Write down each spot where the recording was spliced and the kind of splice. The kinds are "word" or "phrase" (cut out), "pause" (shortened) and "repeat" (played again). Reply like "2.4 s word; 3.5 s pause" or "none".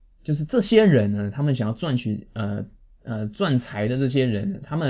none